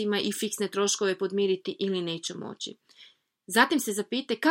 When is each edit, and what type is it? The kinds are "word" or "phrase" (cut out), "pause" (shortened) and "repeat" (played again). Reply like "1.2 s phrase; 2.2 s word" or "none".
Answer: none